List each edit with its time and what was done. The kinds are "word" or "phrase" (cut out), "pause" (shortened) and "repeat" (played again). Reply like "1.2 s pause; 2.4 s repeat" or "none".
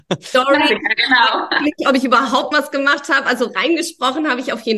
2.5 s word